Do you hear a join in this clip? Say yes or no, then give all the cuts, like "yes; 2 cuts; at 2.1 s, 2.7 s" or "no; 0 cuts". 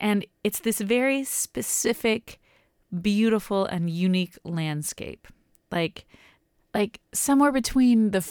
no; 0 cuts